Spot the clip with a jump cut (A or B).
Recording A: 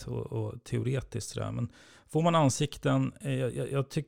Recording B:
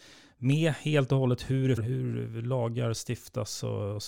B